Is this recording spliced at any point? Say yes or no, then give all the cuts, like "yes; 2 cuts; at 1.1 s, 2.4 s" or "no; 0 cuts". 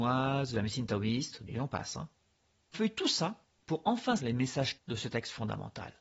yes; 4 cuts; at 1.5 s, 2.7 s, 4.2 s, 4.8 s